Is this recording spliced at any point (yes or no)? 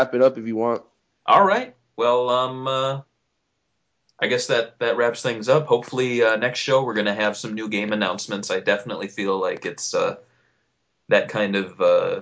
no